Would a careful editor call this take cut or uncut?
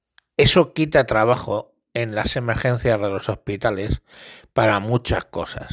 uncut